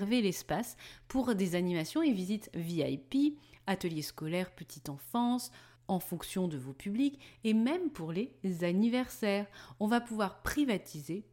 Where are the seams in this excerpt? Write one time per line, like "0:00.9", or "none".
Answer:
none